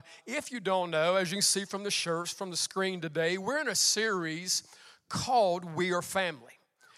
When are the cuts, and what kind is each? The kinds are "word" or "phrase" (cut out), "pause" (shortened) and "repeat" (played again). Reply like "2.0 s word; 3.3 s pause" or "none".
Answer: none

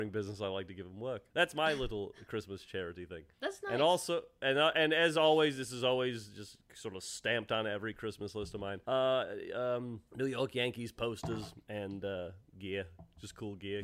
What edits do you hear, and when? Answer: 1.3 s pause; 3.3 s pause; 8.8 s pause; 10.1 s pause; 12.5 s pause

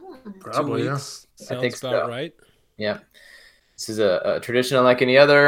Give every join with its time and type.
none

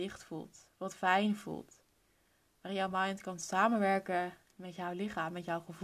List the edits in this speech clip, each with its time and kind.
none

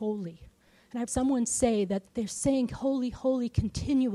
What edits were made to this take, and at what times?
1.1 s word; 2.1 s pause; 2.7 s word

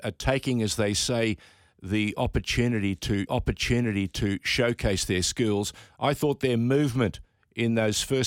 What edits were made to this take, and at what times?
3.3 s repeat

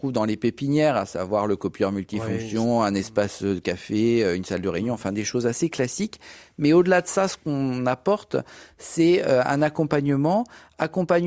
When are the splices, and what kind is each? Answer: none

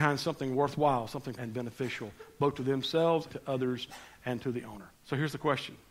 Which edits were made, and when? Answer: 1.4 s phrase; 3.3 s word; 5.0 s pause

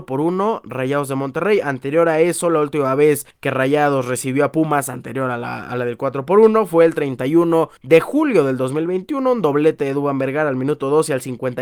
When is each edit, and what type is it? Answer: 3.3 s pause; 7.8 s pause

